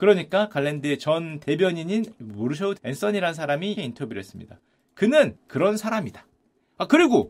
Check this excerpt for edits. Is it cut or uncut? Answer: cut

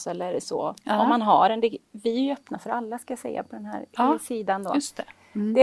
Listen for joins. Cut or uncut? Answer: uncut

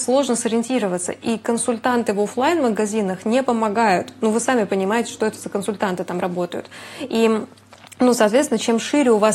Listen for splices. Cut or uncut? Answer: uncut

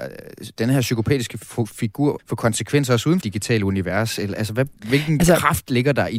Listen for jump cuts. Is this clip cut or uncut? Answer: cut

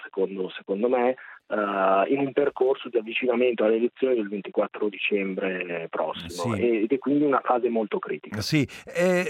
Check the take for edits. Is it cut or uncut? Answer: uncut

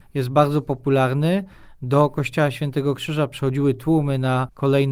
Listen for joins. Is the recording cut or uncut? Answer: uncut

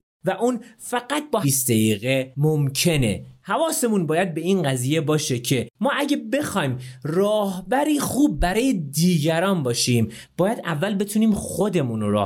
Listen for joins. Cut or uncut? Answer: cut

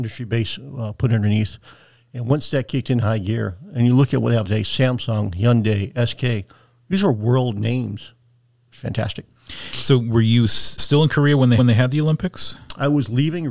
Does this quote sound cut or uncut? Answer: cut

